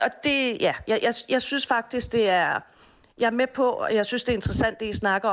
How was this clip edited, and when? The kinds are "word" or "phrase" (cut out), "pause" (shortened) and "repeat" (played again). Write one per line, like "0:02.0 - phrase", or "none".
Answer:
none

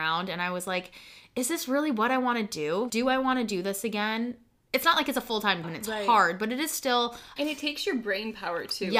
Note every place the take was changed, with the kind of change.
0:02.9 - word
0:04.6 - phrase
0:05.6 - word
0:07.4 - phrase

